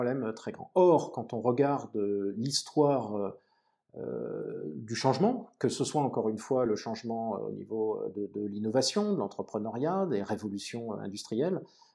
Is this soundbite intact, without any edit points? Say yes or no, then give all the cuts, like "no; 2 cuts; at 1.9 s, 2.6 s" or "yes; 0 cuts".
yes; 0 cuts